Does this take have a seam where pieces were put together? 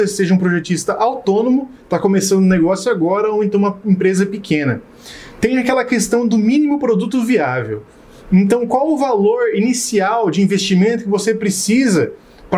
no; 0 cuts

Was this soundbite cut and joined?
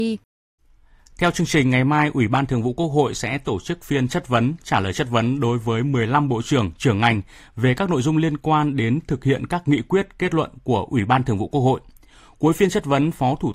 no; 0 cuts

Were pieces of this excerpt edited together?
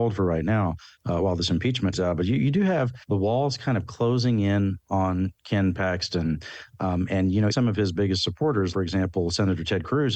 yes; 4 cuts; at 1.9 s, 3.0 s, 7.5 s, 8.7 s

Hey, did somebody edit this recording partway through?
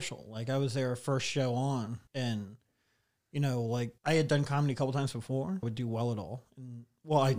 yes; 3 cuts; at 2.1 s, 4.0 s, 5.6 s

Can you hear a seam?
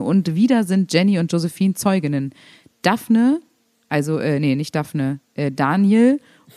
no; 0 cuts

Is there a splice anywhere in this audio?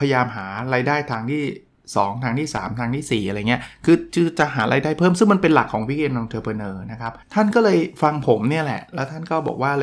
yes; 2 cuts; at 1.7 s, 7.2 s

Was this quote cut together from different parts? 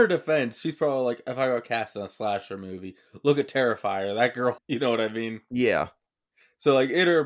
yes; 1 cut; at 4.6 s

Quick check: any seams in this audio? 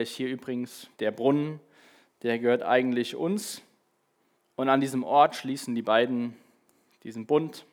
yes; 2 cuts; at 0.9 s, 4.3 s

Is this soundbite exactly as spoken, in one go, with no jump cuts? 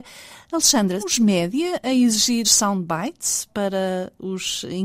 no; 2 cuts; at 1.0 s, 2.4 s

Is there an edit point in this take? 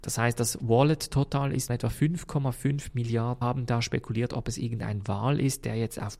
yes; 2 cuts; at 1.7 s, 3.4 s

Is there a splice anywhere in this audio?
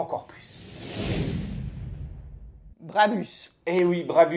yes; 1 cut; at 2.7 s

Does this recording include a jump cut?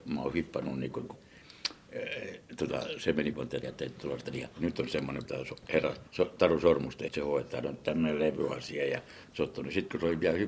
yes; 7 cuts; at 1.2 s, 3.3 s, 3.6 s, 4.5 s, 5.2 s, 6.1 s, 7.1 s

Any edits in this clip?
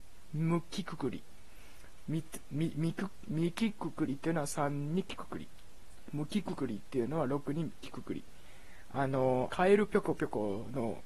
yes; 1 cut; at 9.5 s

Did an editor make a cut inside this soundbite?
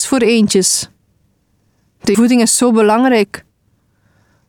yes; 1 cut; at 2.1 s

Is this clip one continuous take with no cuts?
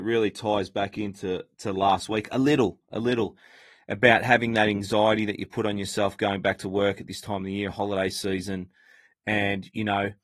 yes; 0 cuts

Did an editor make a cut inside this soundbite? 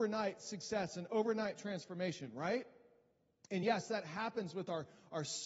no; 0 cuts

